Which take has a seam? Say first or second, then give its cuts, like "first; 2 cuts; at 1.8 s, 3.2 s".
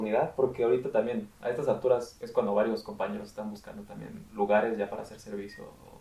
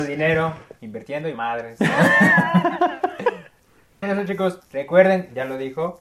second; 3 cuts; at 1.3 s, 4.0 s, 4.7 s